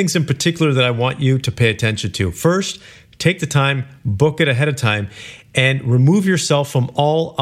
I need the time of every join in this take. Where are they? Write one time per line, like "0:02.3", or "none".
none